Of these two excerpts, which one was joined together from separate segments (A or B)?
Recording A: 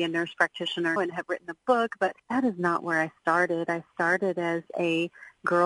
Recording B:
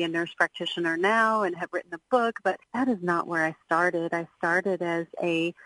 A